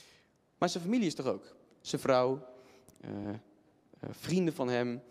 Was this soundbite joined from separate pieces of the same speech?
no; 0 cuts

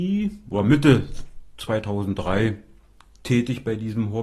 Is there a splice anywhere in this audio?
no; 0 cuts

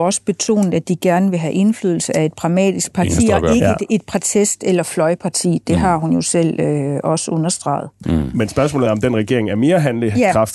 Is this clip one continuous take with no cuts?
yes; 0 cuts

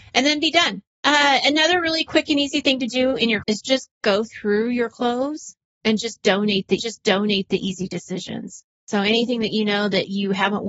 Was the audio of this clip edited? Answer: yes; 3 cuts; at 0.9 s, 3.4 s, 6.8 s

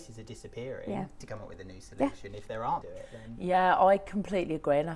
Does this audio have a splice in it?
yes; 2 cuts; at 1.2 s, 2.8 s

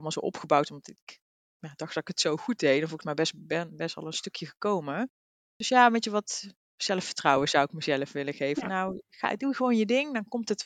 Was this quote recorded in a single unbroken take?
yes; 0 cuts

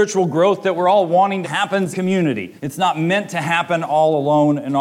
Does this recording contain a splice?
yes; 3 cuts; at 1.4 s, 1.9 s, 2.6 s

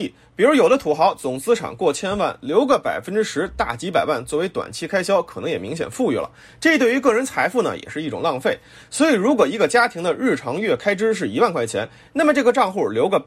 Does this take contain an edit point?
no; 0 cuts

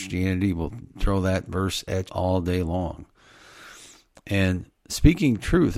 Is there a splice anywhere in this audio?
yes; 1 cut; at 2.1 s

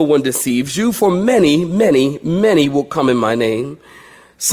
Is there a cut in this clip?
no; 0 cuts

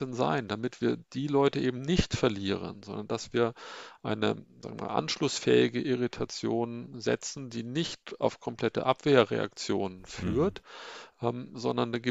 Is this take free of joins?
yes; 0 cuts

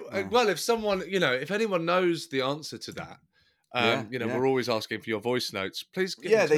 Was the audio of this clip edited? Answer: no; 0 cuts

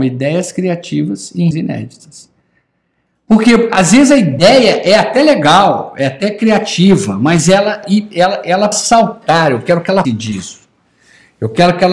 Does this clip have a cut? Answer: yes; 4 cuts; at 1.5 s, 7.8 s, 8.7 s, 10.0 s

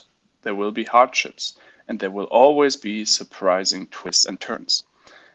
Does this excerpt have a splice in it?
no; 0 cuts

